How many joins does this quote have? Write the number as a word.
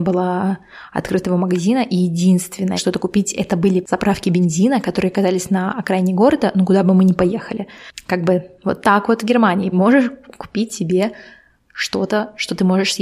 two